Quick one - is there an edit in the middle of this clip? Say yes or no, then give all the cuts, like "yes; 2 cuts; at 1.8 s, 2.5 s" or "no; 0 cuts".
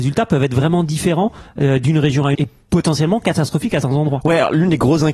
yes; 2 cuts; at 2.3 s, 3.8 s